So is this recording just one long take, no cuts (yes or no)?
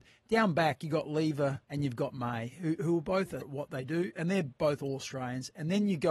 no